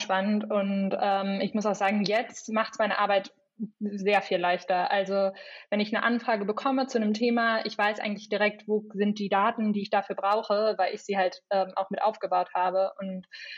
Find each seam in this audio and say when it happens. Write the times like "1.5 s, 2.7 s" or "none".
3.7 s